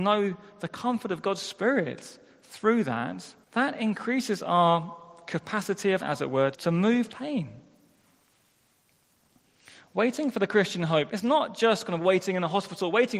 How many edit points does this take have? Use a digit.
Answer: 5